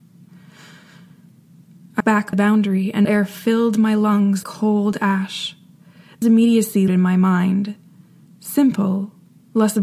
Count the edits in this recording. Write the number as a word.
six